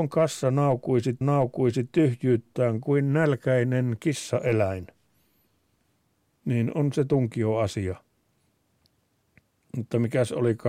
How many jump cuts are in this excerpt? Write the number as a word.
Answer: one